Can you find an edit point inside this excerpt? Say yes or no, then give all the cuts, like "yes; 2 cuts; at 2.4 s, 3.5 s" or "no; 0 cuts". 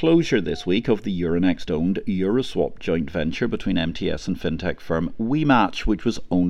no; 0 cuts